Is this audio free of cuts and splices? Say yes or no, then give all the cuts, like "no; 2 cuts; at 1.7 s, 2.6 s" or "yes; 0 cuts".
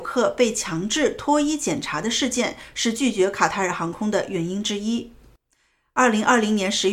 yes; 0 cuts